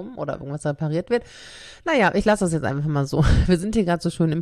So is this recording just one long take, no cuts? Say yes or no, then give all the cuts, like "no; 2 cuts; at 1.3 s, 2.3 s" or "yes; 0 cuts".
yes; 0 cuts